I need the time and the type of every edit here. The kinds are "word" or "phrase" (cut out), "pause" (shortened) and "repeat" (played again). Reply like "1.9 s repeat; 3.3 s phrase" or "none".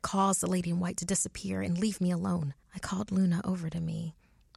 2.6 s pause